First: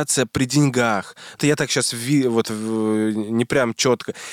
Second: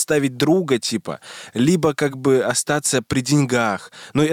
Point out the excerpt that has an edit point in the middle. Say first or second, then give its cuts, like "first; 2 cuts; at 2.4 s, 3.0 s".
first; 1 cut; at 1.4 s